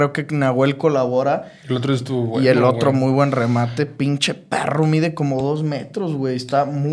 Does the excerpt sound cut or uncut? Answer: uncut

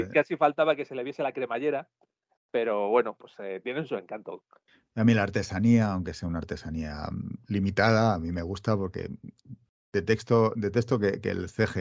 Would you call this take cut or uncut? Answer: uncut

